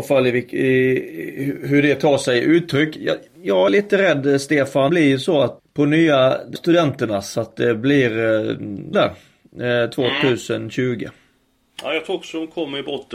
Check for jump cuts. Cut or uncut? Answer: cut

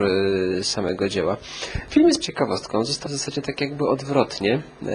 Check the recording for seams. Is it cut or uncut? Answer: cut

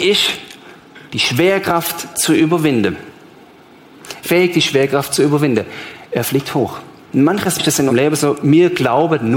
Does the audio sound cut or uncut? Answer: cut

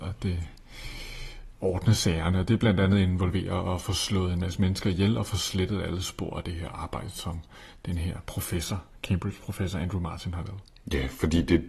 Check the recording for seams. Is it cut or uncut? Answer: uncut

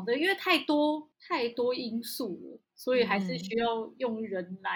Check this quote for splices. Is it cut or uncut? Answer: cut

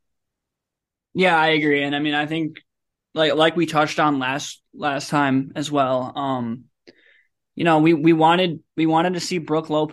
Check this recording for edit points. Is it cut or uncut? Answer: uncut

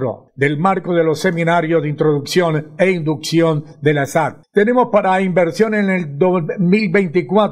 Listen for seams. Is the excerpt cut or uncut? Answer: uncut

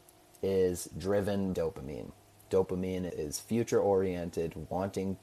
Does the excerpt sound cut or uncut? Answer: cut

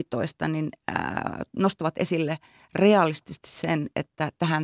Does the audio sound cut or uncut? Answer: uncut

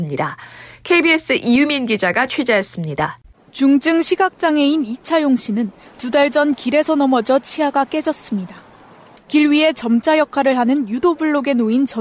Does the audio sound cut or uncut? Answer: uncut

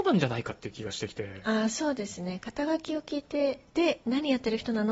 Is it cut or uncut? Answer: cut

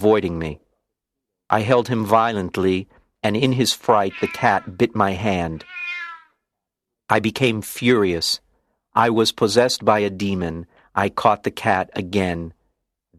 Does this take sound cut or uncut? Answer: uncut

